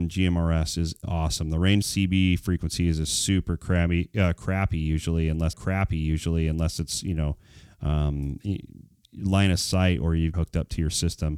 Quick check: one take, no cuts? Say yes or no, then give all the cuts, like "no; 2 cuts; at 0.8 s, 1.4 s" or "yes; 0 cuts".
no; 4 cuts; at 1.0 s, 1.8 s, 5.5 s, 10.3 s